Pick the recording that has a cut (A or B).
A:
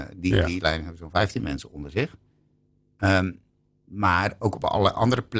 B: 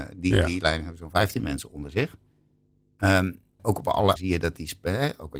B